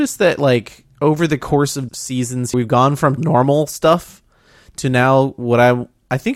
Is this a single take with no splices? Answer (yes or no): no